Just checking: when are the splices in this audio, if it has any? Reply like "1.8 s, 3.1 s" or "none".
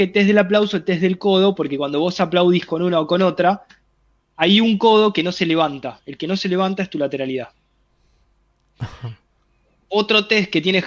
none